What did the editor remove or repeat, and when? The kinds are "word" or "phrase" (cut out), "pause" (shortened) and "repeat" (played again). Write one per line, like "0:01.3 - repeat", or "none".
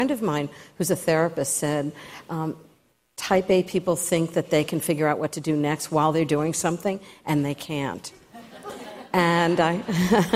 none